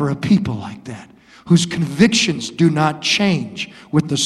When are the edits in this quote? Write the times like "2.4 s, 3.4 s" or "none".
none

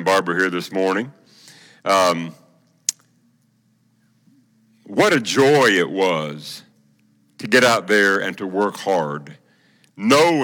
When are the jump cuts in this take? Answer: none

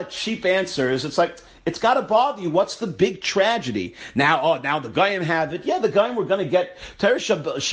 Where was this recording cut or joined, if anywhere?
none

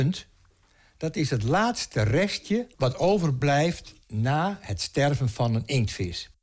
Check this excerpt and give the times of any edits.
2.7 s, 4.0 s

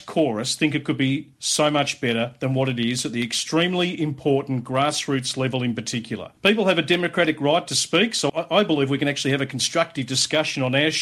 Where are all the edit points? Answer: 6.4 s

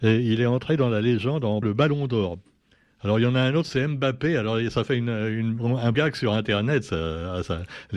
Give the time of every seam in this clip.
1.6 s, 5.9 s

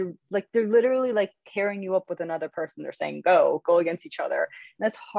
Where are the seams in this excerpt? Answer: none

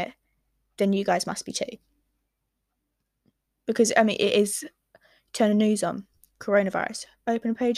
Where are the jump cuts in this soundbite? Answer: none

